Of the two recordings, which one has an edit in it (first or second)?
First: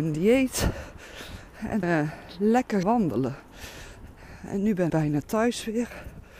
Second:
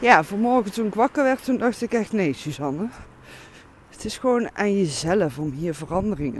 first